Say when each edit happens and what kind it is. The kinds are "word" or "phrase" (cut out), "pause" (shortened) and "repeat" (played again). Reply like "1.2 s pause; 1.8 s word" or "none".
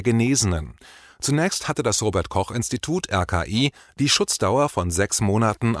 none